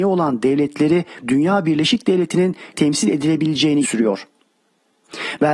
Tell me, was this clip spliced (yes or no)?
yes